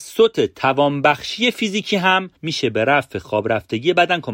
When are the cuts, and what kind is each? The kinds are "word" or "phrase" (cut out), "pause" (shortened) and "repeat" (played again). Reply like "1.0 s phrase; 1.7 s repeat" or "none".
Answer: 2.4 s pause